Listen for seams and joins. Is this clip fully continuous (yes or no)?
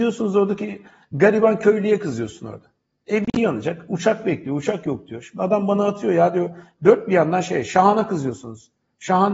yes